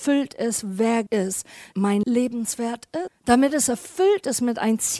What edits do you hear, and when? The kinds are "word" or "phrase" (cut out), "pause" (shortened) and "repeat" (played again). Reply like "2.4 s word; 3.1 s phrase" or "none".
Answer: 1.1 s word; 1.7 s word; 2.0 s word; 3.1 s word